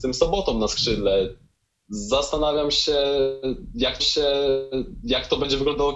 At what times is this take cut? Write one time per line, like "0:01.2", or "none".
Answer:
0:04.0

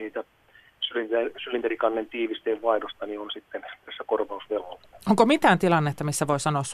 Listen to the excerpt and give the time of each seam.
none

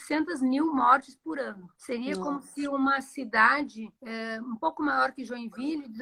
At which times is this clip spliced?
0:01.8
0:04.0

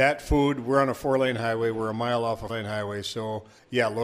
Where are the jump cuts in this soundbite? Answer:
0:02.5

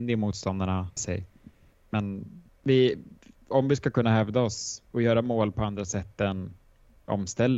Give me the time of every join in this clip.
0:01.0
0:02.4
0:04.9

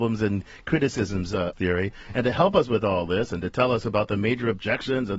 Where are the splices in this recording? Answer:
0:01.5

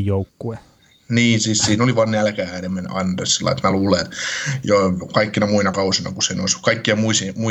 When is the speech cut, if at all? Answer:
none

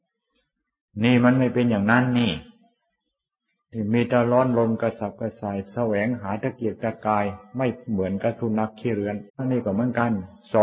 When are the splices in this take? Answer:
0:09.3

